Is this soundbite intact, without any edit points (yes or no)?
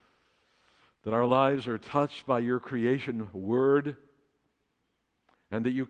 yes